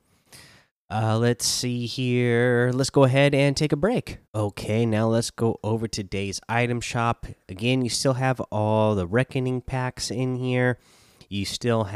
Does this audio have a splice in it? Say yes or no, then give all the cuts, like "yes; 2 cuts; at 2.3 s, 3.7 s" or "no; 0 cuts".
yes; 1 cut; at 4.2 s